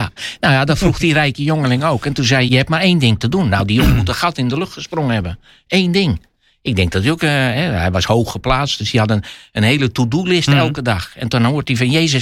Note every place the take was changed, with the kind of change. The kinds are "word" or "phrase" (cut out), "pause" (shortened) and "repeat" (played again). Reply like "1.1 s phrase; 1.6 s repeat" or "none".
2.5 s phrase

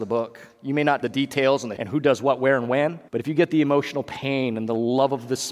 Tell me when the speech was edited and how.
1.0 s word; 1.8 s word; 3.1 s pause

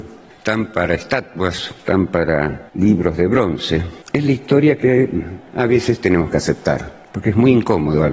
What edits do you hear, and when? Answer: 4.0 s pause

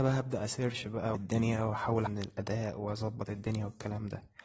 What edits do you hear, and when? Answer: 1.1 s word; 2.1 s word

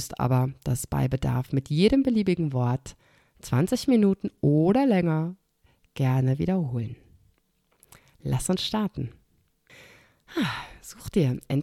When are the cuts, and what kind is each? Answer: none

